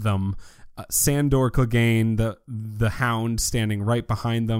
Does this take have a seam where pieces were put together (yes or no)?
no